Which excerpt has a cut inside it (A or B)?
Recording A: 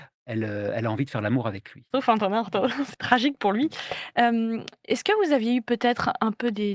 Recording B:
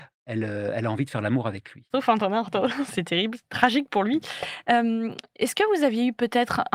A